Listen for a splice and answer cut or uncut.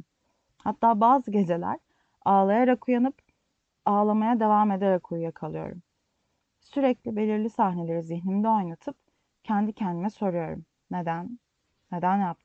uncut